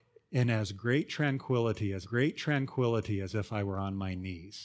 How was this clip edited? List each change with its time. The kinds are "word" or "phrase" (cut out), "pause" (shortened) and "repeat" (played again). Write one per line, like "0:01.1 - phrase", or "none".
0:02.0 - repeat